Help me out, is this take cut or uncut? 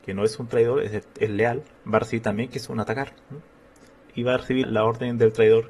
cut